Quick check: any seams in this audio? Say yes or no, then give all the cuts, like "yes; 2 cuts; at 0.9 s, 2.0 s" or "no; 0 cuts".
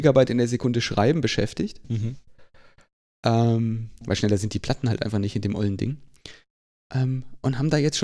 no; 0 cuts